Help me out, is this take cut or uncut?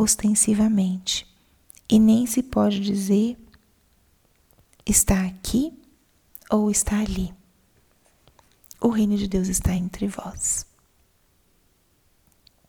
uncut